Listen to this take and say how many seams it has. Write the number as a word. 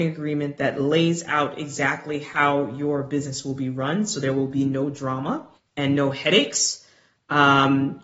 one